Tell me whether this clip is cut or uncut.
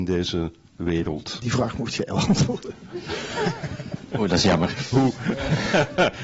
uncut